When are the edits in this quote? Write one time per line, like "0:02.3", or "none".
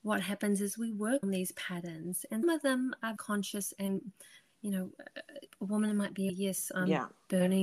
0:01.2
0:02.4
0:03.2
0:05.5
0:06.3